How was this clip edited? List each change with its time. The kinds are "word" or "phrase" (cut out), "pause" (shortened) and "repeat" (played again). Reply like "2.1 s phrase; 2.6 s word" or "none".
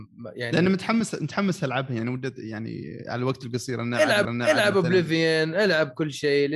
4.2 s repeat